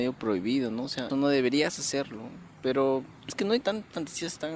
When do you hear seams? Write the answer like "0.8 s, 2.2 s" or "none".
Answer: 1.1 s, 3.3 s, 3.6 s